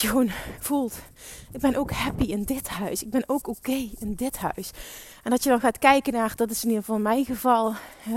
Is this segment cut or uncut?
uncut